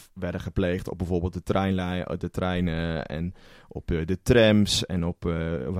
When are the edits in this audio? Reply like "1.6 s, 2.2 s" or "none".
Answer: none